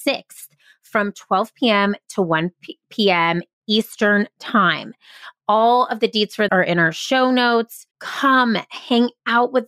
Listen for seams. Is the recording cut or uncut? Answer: cut